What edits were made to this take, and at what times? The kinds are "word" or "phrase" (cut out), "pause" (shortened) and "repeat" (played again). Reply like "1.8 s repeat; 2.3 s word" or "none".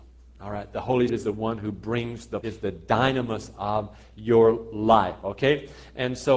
1.1 s word; 2.4 s word